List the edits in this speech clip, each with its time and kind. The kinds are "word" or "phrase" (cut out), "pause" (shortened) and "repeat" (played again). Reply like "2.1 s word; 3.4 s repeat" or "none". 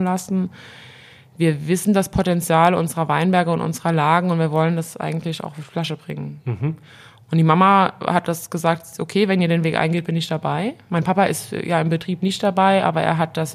none